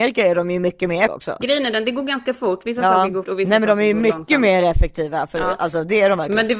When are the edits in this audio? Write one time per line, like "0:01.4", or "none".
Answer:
0:01.1
0:03.2